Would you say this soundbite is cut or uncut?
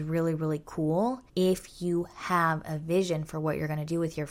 cut